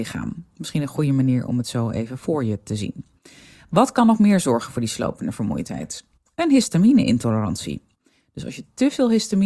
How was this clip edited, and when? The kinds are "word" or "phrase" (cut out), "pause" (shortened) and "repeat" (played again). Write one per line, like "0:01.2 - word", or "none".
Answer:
none